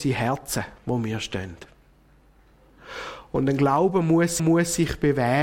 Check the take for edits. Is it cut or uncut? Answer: cut